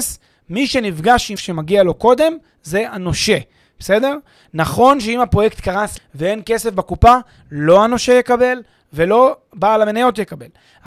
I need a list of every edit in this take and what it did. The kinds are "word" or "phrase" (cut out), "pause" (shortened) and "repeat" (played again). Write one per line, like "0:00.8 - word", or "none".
0:01.4 - word
0:06.0 - word